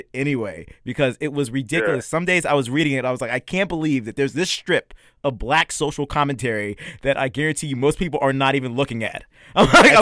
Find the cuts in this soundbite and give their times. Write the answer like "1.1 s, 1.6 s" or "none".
none